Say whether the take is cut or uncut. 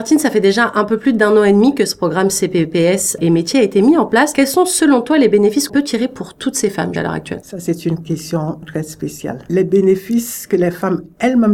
cut